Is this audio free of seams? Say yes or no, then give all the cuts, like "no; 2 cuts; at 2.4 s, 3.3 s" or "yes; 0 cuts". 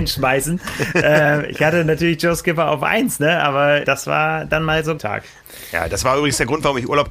no; 2 cuts; at 3.8 s, 5.0 s